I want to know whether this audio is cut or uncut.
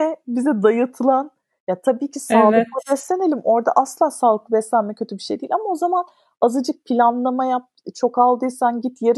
uncut